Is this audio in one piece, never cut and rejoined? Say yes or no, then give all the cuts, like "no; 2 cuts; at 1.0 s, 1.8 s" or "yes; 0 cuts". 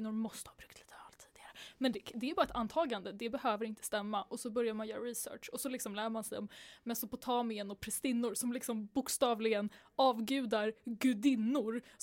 yes; 0 cuts